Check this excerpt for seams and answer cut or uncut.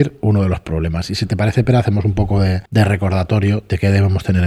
cut